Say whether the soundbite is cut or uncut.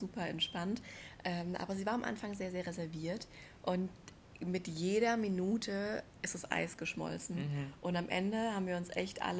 uncut